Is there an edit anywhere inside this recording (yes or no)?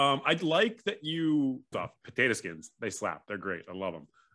yes